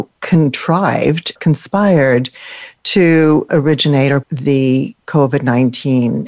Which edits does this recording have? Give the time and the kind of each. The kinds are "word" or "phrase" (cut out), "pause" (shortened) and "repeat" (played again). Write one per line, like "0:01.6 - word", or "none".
0:01.4 - word
0:03.5 - word
0:04.2 - word

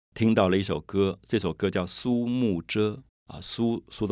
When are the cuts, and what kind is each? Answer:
0:03.1 - pause

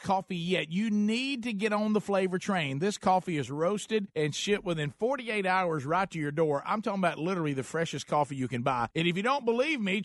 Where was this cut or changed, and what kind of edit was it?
none

